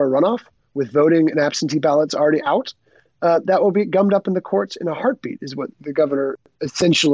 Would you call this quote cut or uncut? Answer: cut